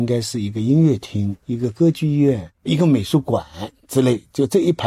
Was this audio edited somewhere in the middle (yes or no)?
yes